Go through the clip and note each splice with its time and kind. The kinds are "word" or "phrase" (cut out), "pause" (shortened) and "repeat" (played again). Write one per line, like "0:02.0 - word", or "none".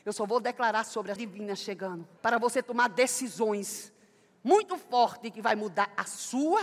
0:01.2 - phrase
0:02.2 - pause